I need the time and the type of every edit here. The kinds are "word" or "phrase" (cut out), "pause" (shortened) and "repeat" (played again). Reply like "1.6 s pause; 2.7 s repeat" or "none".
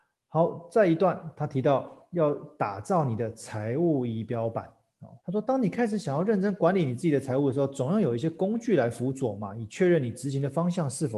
5.2 s pause